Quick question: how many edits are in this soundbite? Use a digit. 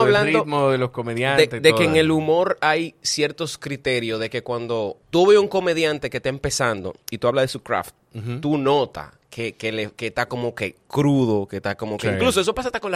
3